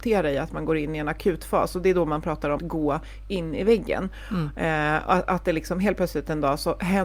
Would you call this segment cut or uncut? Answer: cut